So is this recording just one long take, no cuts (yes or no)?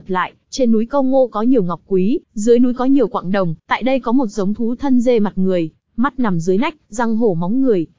no